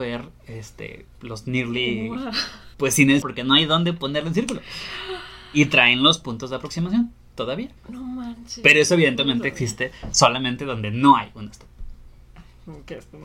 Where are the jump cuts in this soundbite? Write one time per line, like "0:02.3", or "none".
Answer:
0:01.1
0:02.7
0:03.2
0:07.8